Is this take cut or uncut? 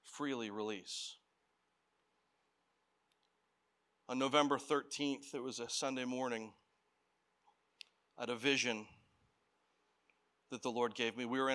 uncut